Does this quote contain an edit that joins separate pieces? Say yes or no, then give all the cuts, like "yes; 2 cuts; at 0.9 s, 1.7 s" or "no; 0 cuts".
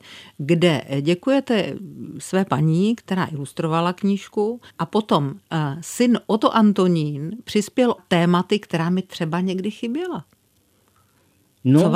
yes; 2 cuts; at 4.7 s, 8.0 s